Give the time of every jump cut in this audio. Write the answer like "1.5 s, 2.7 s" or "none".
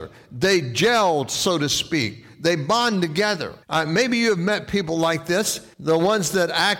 3.6 s, 5.7 s